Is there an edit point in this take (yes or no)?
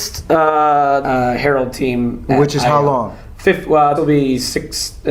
yes